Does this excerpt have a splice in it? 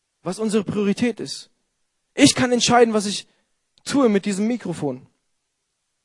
no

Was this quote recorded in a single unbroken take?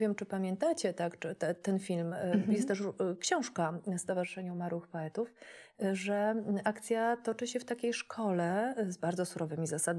yes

